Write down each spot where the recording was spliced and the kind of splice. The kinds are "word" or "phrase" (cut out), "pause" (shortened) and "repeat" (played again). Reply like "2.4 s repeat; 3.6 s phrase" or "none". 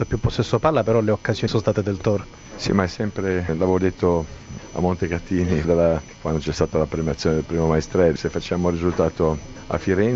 1.5 s phrase; 3.5 s word; 5.6 s word; 8.2 s word